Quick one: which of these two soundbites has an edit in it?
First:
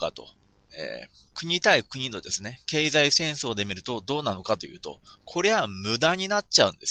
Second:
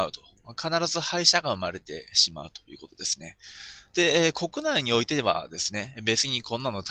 first; 1 cut; at 1.3 s

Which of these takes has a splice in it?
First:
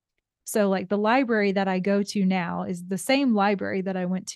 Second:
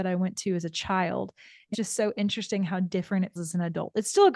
second; 2 cuts; at 1.7 s, 3.4 s

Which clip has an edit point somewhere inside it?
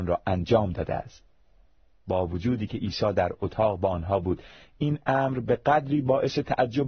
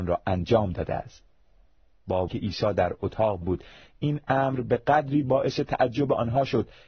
second; 2 cuts; at 2.3 s, 3.4 s

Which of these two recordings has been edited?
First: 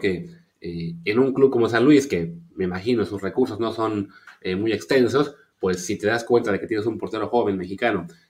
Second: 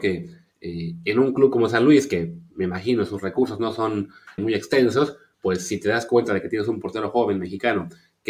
second; 1 cut; at 4.4 s

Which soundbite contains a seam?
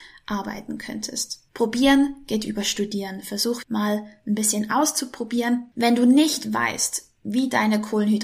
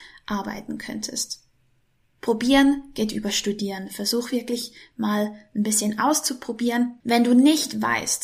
first; 2 cuts; at 1.5 s, 3.6 s

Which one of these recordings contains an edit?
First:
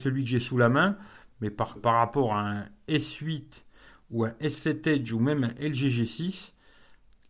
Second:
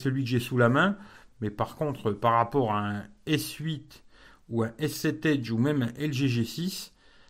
first; 1 cut; at 1.8 s

